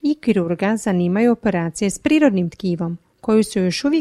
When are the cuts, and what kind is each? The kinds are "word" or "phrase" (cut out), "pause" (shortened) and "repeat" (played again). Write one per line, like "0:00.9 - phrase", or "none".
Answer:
none